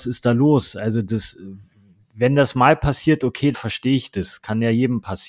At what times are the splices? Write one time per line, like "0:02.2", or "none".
0:03.5